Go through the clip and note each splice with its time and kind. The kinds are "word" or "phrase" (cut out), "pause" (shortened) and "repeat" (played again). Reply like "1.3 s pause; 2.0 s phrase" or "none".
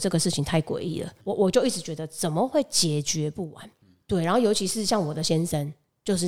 1.2 s pause